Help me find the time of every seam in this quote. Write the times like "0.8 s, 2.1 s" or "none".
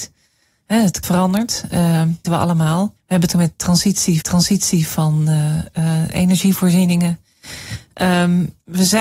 1.0 s, 2.2 s, 3.0 s, 3.3 s, 4.2 s